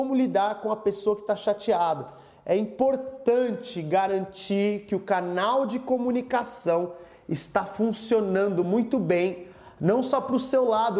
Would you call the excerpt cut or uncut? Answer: uncut